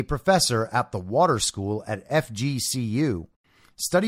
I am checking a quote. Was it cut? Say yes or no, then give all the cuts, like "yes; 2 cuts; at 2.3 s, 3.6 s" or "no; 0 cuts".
no; 0 cuts